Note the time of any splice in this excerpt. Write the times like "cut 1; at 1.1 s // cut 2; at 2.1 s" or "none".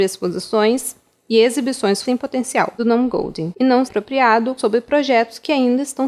cut 1; at 2.1 s // cut 2; at 2.8 s // cut 3; at 3.9 s // cut 4; at 4.6 s